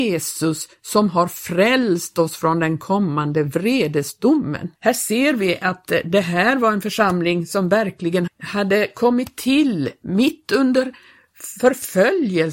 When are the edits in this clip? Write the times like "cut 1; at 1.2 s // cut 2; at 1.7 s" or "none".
cut 1; at 4.8 s // cut 2; at 8.3 s